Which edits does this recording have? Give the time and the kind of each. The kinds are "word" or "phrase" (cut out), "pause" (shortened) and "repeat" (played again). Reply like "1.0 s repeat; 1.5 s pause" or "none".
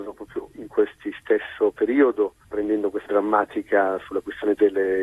2.4 s pause; 3.1 s word

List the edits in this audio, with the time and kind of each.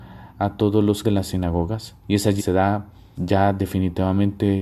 1.0 s word; 2.0 s pause; 2.4 s word; 3.2 s word

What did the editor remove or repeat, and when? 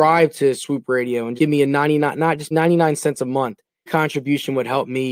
1.4 s word; 2.5 s word; 3.9 s word

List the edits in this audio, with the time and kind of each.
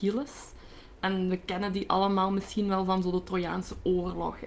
none

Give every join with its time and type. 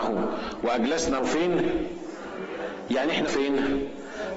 1.2 s word; 3.3 s word

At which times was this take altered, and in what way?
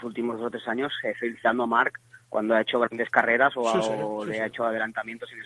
none

